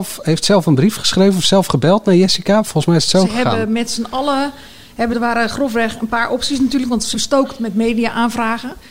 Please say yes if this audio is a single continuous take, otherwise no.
no